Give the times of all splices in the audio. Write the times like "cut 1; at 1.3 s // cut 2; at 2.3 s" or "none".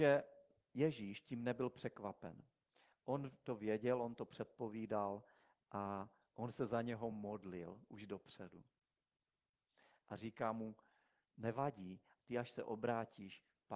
none